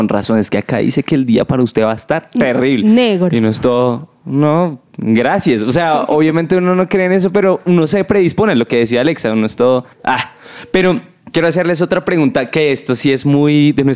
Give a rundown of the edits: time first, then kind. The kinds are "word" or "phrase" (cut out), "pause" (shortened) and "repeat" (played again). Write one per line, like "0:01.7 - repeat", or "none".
0:09.9 - pause
0:11.2 - pause